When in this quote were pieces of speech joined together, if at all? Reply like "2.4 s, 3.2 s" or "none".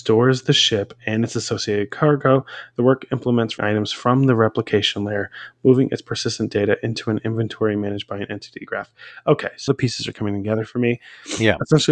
3.6 s, 9.7 s